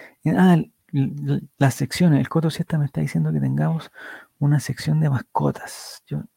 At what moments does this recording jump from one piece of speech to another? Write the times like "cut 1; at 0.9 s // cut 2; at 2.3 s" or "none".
none